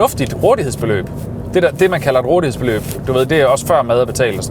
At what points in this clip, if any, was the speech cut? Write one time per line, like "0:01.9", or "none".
none